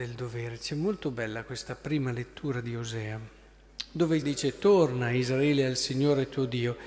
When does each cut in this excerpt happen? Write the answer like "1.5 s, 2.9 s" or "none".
4.2 s